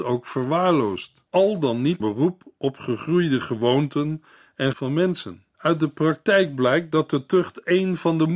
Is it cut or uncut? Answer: cut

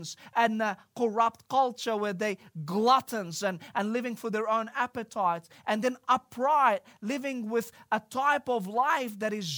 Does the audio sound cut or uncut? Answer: uncut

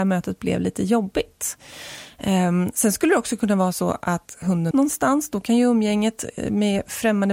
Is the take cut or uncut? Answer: cut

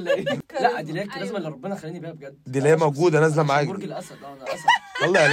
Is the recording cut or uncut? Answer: uncut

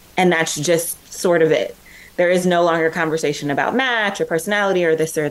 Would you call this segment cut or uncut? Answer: uncut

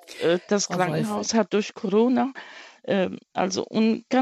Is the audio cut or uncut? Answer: uncut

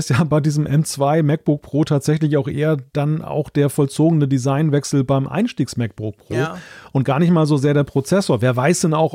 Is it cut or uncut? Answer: uncut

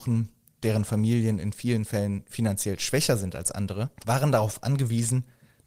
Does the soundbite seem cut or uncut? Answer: cut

